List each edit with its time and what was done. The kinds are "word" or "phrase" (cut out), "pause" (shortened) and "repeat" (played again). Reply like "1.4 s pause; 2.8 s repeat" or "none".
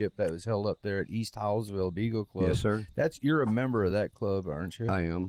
none